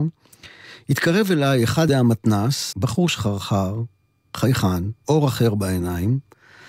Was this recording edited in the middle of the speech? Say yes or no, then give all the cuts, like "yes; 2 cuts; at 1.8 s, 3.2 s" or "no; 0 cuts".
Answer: yes; 3 cuts; at 1.9 s, 2.7 s, 5.0 s